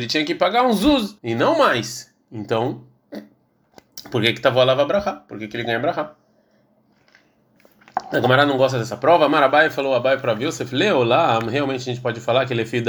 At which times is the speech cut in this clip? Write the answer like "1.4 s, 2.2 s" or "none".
1.2 s